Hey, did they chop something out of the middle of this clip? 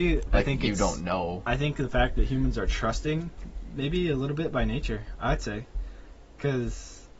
no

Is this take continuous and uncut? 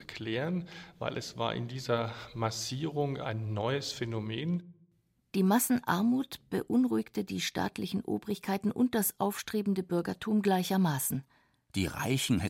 yes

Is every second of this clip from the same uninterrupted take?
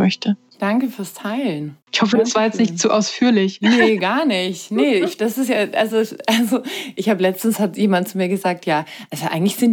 no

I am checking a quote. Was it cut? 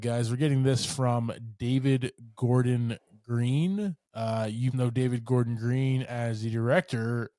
yes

